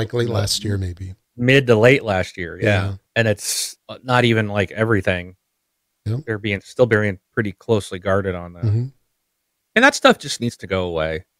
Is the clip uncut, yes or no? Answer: no